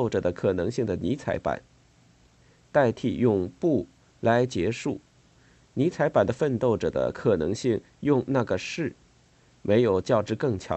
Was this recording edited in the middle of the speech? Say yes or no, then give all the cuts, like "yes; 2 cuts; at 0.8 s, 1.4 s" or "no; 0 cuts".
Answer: no; 0 cuts